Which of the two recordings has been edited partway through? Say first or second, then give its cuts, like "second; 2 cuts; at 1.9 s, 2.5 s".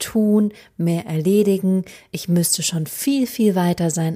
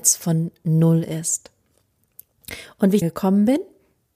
second; 1 cut; at 3.0 s